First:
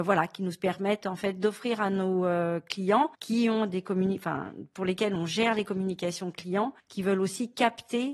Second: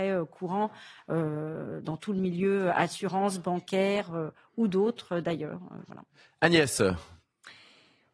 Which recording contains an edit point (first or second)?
first